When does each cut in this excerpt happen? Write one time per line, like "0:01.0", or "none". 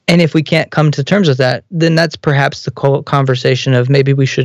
none

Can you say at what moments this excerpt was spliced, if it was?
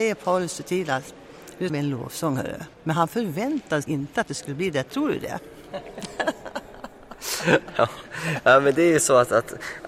0:01.7
0:02.7
0:03.8
0:04.9

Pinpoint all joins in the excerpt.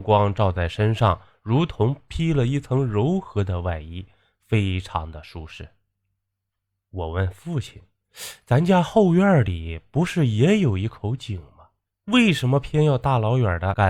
0:11.8

